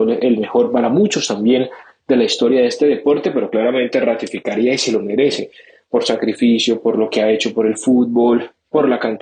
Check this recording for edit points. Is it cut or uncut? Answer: uncut